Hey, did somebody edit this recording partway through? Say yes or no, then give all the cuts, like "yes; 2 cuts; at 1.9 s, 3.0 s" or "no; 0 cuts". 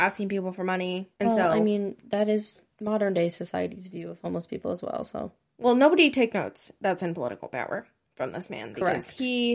yes; 1 cut; at 1.1 s